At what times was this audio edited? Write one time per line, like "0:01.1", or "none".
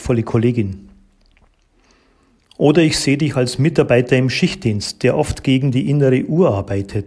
none